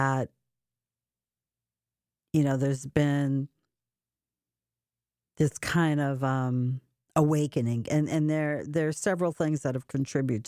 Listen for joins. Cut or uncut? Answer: uncut